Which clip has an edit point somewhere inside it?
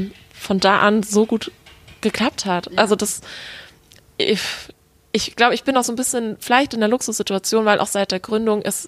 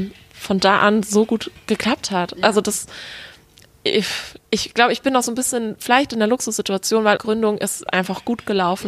second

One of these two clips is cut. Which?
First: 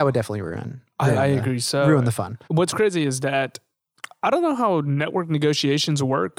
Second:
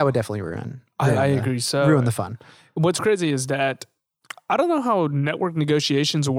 first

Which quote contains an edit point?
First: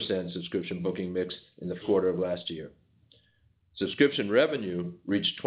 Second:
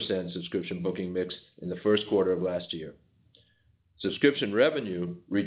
first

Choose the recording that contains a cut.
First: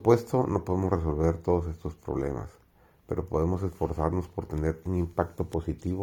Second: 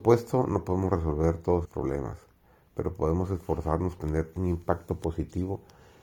second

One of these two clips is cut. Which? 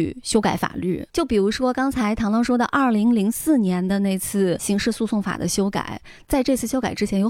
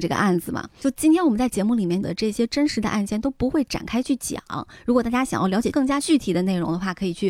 first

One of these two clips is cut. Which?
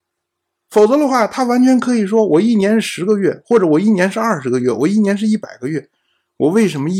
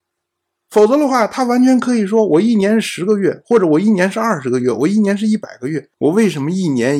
second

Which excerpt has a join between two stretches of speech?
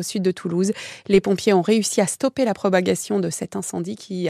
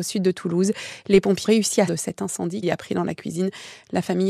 second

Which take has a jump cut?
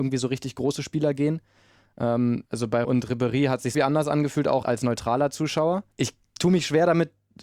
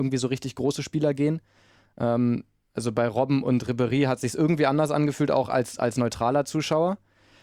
first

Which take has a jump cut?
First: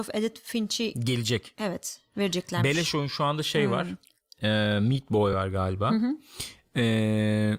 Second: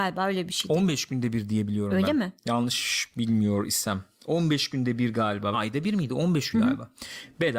second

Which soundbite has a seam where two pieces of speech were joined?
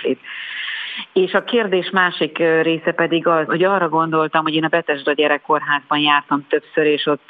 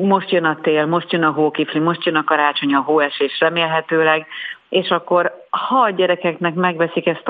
first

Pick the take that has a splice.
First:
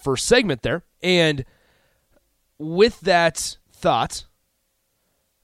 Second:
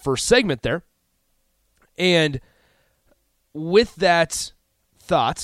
first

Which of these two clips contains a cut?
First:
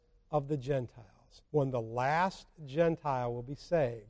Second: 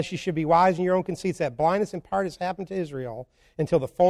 first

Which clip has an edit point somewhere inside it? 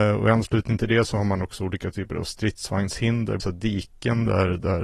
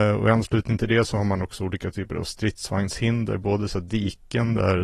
first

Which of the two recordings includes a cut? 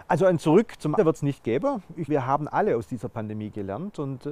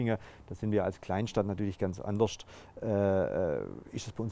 first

